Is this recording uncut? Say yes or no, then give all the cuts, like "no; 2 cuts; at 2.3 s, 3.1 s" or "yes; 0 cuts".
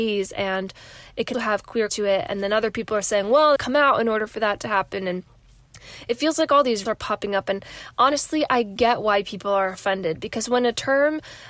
no; 4 cuts; at 1.3 s, 1.9 s, 3.6 s, 6.9 s